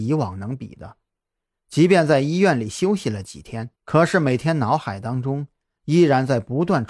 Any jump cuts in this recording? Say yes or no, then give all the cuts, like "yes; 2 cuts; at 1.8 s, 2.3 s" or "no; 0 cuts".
yes; 1 cut; at 3.8 s